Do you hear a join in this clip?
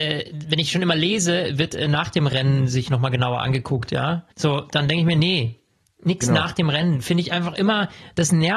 yes; 1 cut; at 4.3 s

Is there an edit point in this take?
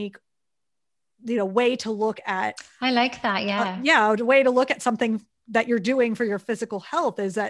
no; 0 cuts

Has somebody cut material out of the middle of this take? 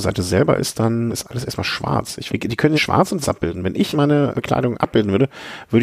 yes; 6 cuts; at 1.1 s, 2.3 s, 2.7 s, 3.2 s, 3.9 s, 4.3 s

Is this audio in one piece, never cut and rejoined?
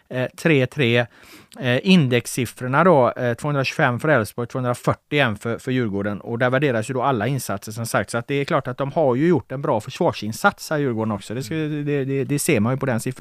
yes; 0 cuts

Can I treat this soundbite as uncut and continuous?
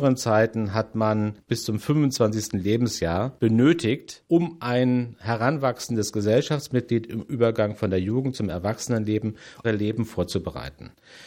no; 1 cut; at 9.6 s

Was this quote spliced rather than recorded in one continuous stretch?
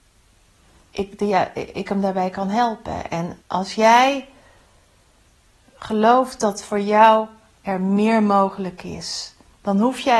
yes; 1 cut; at 3.4 s

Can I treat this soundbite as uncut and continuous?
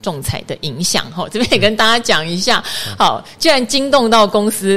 yes; 0 cuts

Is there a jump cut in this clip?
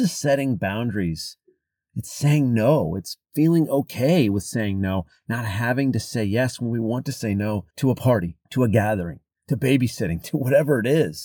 yes; 3 cuts; at 3.2 s, 7.7 s, 8.4 s

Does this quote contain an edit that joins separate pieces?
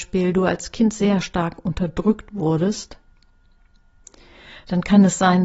no; 0 cuts

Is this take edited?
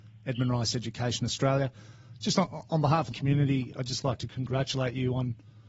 yes; 2 cuts; at 3.1 s, 3.7 s

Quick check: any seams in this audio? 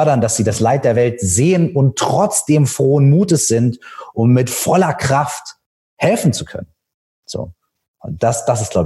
no; 0 cuts

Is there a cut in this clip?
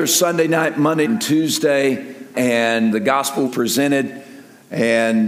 yes; 4 cuts; at 1.1 s, 2.3 s, 2.9 s, 3.5 s

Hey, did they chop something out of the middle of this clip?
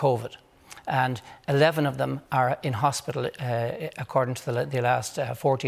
no; 0 cuts

